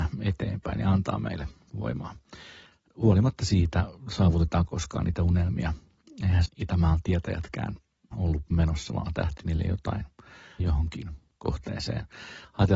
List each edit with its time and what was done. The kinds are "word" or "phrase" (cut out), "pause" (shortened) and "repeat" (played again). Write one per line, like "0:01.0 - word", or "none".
0:04.7 - word
0:06.5 - word
0:08.1 - word
0:09.4 - word
0:10.6 - word
0:11.4 - word